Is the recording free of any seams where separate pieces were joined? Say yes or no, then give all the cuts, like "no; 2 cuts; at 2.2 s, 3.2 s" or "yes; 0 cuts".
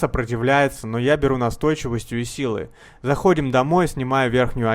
yes; 0 cuts